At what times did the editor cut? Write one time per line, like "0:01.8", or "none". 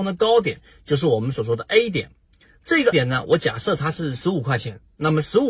0:02.9